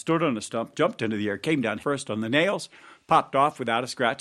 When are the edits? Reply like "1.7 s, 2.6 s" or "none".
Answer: 1.8 s